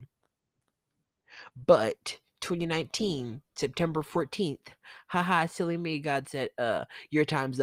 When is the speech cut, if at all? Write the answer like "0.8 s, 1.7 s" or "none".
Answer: none